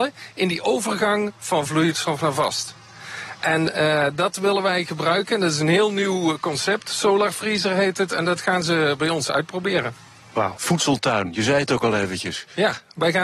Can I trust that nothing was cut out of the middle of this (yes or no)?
yes